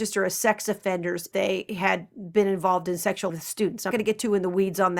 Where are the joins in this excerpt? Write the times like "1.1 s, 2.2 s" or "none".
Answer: 1.3 s, 3.3 s, 3.9 s